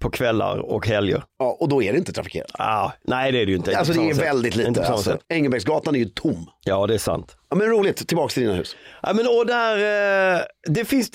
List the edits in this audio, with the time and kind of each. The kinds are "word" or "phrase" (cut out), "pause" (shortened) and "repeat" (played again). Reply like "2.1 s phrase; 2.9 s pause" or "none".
1.3 s pause; 5.2 s pause